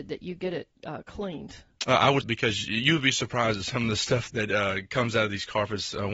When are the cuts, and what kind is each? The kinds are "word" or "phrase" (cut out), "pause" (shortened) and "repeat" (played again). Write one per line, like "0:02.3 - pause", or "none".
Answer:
0:02.2 - phrase
0:04.3 - word